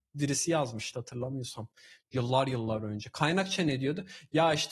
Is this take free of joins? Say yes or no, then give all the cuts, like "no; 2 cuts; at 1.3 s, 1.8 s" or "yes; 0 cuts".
no; 1 cut; at 0.9 s